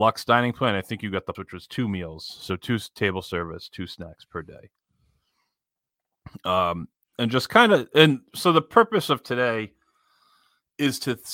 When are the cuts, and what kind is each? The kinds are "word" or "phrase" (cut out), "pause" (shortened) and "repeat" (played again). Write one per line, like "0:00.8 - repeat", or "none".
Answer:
0:01.3 - word